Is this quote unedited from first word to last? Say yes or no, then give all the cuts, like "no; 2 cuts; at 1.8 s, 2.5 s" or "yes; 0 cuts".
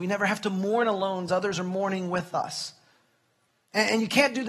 no; 1 cut; at 1.3 s